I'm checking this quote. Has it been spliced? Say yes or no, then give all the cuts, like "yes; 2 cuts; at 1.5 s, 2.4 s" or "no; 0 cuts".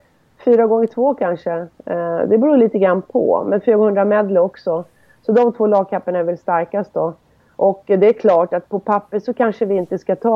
no; 0 cuts